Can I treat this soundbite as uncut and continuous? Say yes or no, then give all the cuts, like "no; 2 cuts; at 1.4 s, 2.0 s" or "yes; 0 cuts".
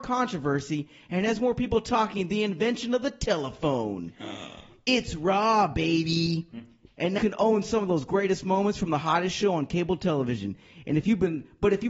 no; 1 cut; at 7.2 s